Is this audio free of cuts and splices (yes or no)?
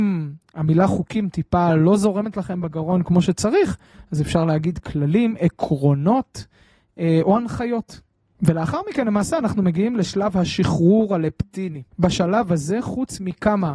no